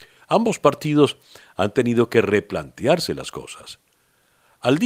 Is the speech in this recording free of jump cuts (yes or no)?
yes